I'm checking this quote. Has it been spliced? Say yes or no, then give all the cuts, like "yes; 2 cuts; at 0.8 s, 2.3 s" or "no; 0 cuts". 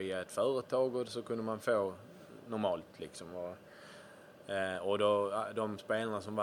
no; 0 cuts